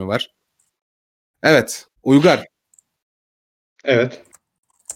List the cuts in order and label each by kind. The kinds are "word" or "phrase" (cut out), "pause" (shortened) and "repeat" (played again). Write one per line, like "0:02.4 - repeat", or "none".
0:01.9 - pause